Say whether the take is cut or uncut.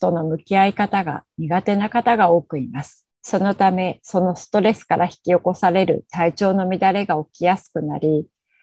cut